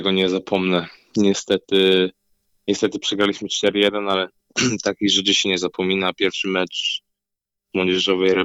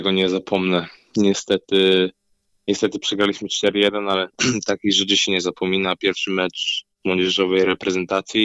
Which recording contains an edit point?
second; 2 cuts; at 4.3 s, 6.9 s

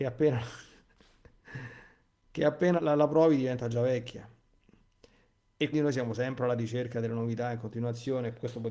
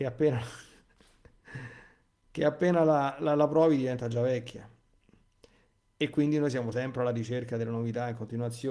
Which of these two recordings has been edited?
first; 2 cuts; at 2.8 s, 5.7 s

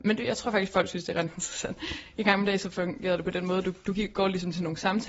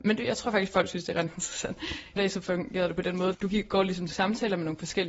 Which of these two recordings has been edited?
second; 3 cuts; at 2.2 s, 3.3 s, 4.1 s

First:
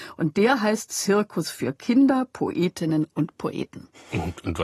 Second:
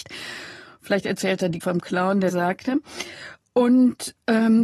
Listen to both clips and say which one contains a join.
second; 2 cuts; at 1.6 s, 2.3 s

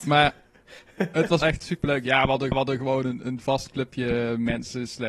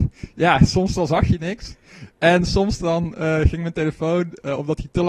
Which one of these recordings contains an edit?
first; 2 cuts; at 1.4 s, 2.5 s

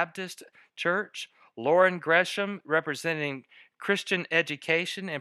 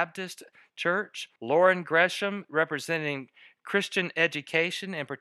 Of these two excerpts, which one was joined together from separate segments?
second; 1 cut; at 1.4 s

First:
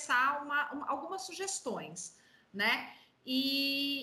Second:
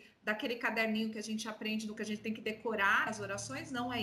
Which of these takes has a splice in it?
second; 2 cuts; at 2.0 s, 3.1 s

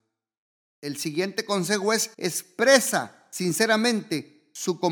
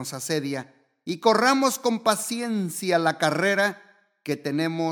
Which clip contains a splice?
first; 1 cut; at 2.1 s

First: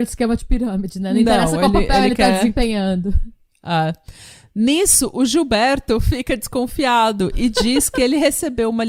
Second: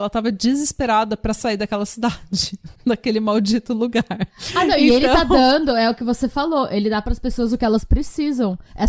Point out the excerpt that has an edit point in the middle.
second; 1 cut; at 2.8 s

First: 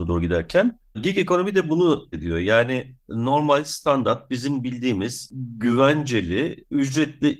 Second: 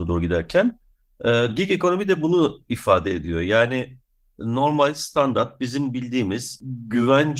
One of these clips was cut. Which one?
first; 3 cuts; at 0.9 s, 2.1 s, 3.0 s

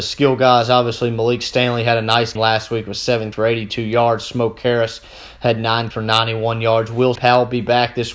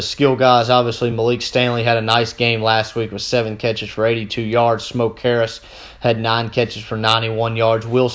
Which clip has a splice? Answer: first; 4 cuts; at 2.4 s, 3.3 s, 5.9 s, 7.2 s

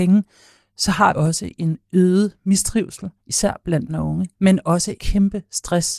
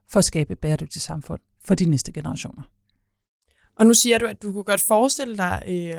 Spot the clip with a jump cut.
first; 5 cuts; at 1.1 s, 3.2 s, 3.9 s, 4.3 s, 5.0 s

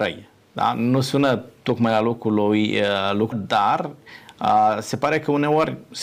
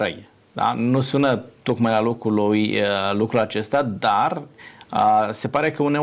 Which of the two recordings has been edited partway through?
first; 1 cut; at 3.3 s

